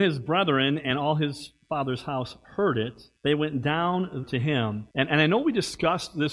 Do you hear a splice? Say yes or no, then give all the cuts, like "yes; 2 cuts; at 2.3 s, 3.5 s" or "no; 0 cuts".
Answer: yes; 3 cuts; at 3.2 s, 4.2 s, 4.9 s